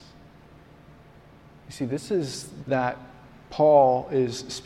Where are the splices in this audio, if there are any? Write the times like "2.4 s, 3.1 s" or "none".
2.6 s